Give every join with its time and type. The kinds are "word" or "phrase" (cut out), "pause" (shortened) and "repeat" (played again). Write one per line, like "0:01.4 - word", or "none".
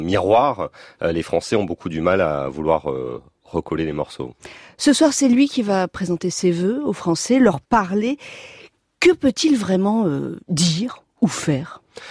none